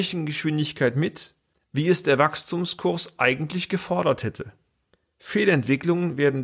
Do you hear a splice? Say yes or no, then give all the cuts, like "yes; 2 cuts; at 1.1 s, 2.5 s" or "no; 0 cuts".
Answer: no; 0 cuts